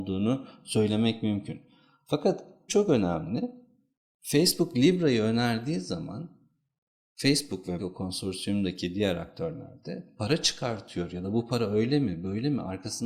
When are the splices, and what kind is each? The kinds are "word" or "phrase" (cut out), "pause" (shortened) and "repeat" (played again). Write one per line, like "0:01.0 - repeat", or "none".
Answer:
0:02.7 - word
0:07.8 - word

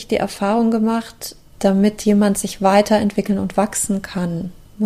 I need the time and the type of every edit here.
none

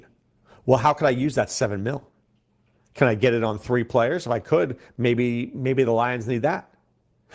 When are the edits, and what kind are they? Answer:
none

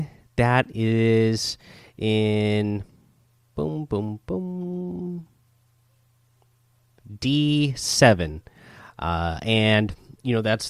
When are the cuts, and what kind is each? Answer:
none

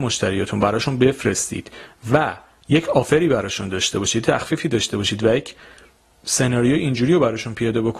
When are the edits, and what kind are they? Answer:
none

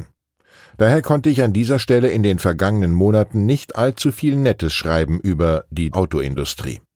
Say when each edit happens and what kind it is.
0:05.9 - word

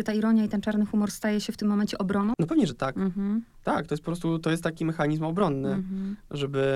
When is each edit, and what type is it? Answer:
none

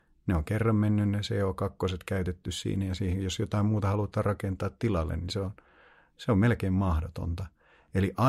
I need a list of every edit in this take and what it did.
none

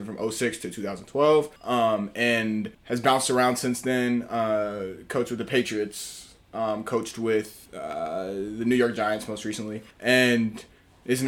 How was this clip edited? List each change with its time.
0:01.6 - pause
0:02.7 - pause
0:07.7 - pause
0:09.9 - pause

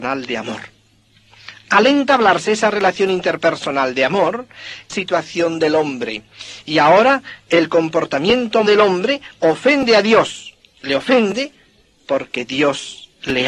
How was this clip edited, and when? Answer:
0:04.9 - phrase
0:08.7 - word
0:10.6 - pause

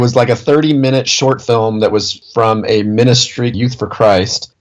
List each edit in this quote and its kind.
0:03.5 - word

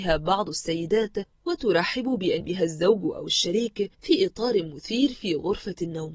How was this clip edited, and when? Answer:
0:02.4 - word
0:03.9 - pause

